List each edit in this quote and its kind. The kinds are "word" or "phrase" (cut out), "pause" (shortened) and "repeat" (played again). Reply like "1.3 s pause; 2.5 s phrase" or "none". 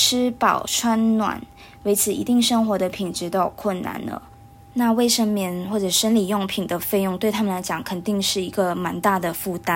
none

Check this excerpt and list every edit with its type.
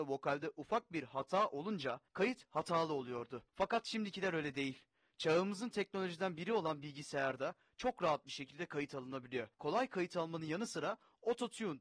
2.1 s pause; 3.5 s pause; 9.5 s pause

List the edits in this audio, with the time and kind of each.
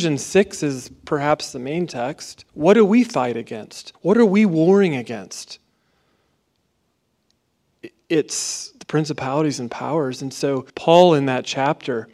2.5 s pause; 3.9 s pause; 10.7 s pause

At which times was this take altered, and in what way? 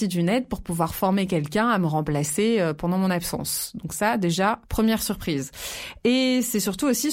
4.7 s pause

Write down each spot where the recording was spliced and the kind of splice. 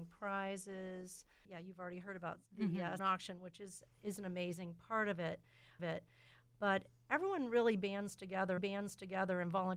2.5 s pause; 3.0 s word; 5.8 s repeat; 8.6 s repeat

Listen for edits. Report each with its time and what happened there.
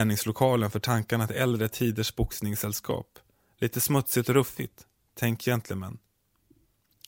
none

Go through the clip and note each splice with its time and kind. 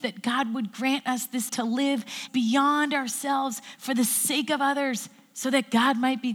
1.5 s word; 2.3 s phrase

